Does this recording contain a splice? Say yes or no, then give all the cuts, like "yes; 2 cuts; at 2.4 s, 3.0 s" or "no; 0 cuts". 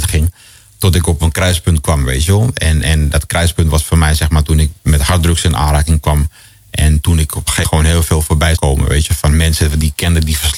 yes; 2 cuts; at 7.6 s, 8.6 s